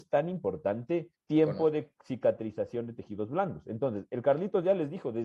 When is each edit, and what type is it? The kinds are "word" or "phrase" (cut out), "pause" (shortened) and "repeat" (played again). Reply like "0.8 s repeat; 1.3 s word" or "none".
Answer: 1.2 s pause